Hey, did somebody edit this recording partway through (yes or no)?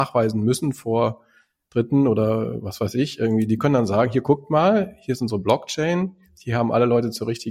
no